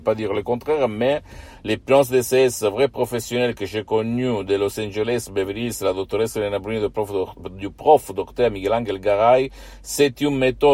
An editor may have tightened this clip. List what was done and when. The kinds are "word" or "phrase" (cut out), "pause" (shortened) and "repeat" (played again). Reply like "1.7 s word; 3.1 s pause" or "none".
none